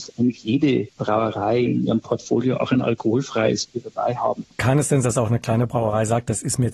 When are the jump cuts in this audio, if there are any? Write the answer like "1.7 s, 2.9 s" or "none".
5.0 s